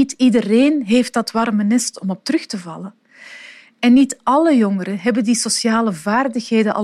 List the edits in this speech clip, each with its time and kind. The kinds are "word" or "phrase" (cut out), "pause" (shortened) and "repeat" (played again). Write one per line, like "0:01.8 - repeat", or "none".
none

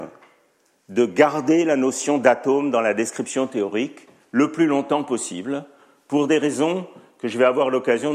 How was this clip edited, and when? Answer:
none

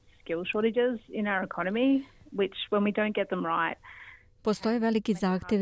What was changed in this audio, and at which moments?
none

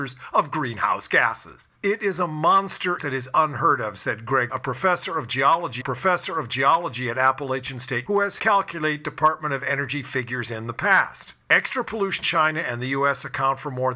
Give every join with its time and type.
0:01.7 - pause
0:03.0 - word
0:04.5 - word
0:05.8 - repeat
0:08.0 - word
0:08.4 - word
0:11.4 - pause
0:12.2 - word

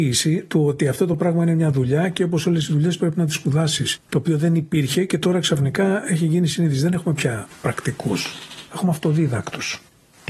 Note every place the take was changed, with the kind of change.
0:04.0 - pause

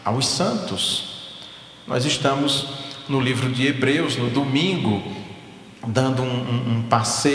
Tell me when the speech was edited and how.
0:05.8 - pause

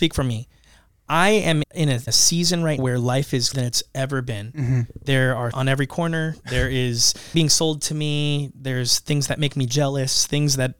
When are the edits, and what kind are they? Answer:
0:01.6 - word
0:02.1 - word
0:02.8 - word
0:03.5 - word
0:05.5 - word
0:07.3 - word

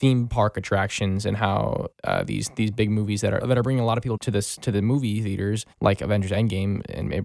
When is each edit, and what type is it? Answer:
0:01.9 - pause
0:03.4 - word
0:04.2 - word
0:05.7 - pause

